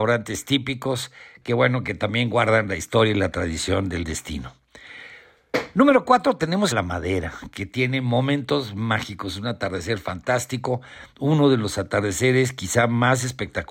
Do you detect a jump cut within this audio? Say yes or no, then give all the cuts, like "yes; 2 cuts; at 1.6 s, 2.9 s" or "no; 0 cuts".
yes; 1 cut; at 6.7 s